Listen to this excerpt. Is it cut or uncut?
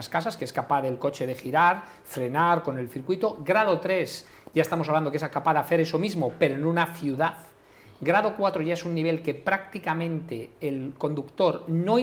uncut